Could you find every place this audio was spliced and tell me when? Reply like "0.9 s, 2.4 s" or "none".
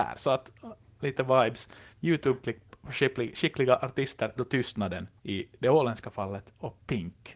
1.0 s, 1.9 s, 4.4 s, 5.2 s